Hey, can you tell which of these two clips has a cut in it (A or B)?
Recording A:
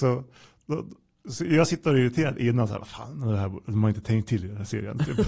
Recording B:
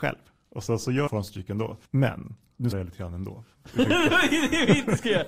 B